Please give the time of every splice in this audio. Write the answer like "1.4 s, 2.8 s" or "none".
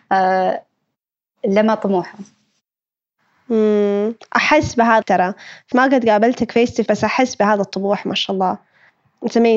5.0 s, 5.7 s, 6.9 s

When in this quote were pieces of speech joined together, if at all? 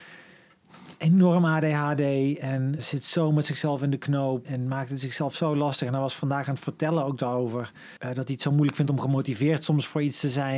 2.8 s, 4.4 s, 8.0 s

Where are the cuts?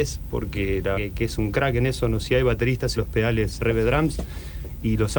0.9 s, 2.2 s, 3.0 s, 3.6 s

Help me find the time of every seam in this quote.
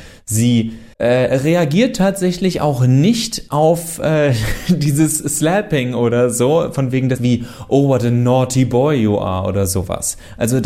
0.9 s, 7.2 s

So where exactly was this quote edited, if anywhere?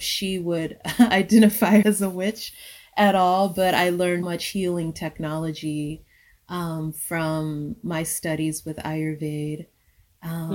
1.8 s, 4.2 s

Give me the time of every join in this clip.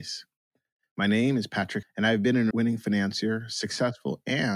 1.8 s, 2.5 s

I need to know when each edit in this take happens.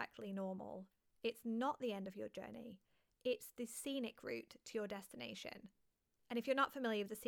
none

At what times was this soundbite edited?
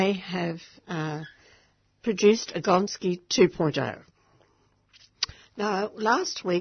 none

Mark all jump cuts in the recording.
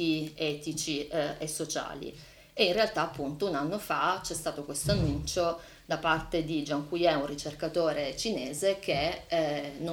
none

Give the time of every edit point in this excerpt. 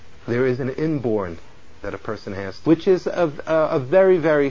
1.8 s, 2.6 s

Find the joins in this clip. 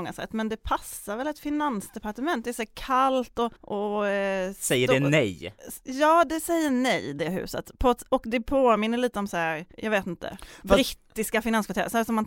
3.6 s, 9.7 s

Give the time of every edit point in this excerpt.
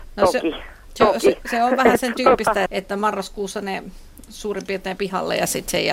2.7 s, 5.0 s

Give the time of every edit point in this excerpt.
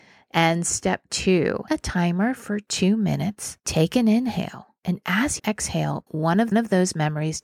1.7 s, 3.6 s, 4.8 s, 5.4 s, 6.1 s, 6.5 s

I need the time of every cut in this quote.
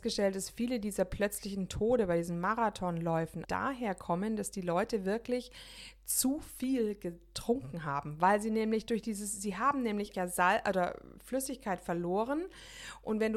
3.4 s, 10.1 s

